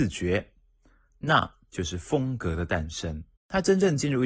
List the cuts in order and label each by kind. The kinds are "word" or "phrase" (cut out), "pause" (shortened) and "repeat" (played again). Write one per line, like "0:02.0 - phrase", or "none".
0:03.4 - pause